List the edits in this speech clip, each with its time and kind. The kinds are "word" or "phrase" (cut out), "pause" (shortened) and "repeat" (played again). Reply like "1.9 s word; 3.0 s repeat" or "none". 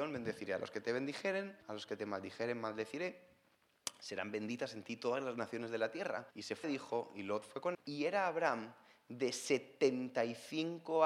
1.6 s pause; 6.3 s pause; 6.6 s phrase; 7.7 s word